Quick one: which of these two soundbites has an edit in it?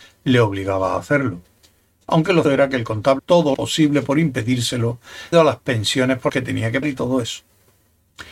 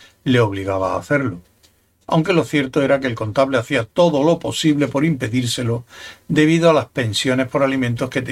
first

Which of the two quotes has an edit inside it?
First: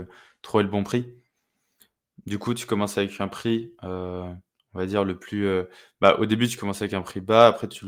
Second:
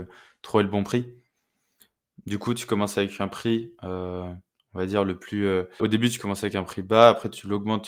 second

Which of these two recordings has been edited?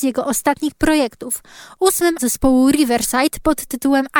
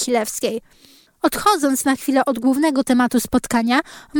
first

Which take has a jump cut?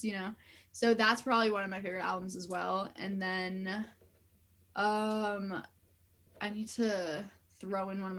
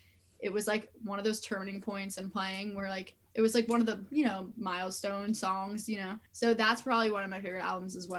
second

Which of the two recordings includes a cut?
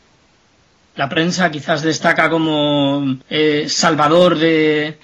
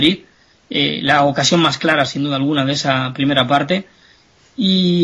first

